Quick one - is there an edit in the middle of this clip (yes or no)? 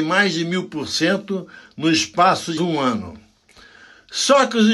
yes